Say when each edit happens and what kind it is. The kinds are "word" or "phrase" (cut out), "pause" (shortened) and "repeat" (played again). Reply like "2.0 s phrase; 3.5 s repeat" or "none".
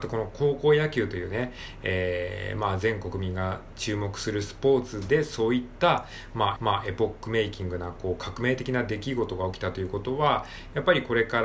6.6 s repeat